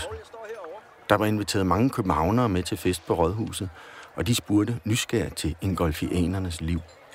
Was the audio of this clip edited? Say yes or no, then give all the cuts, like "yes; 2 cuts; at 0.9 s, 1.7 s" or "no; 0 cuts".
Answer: no; 0 cuts